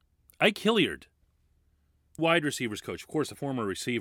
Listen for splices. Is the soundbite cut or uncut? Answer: cut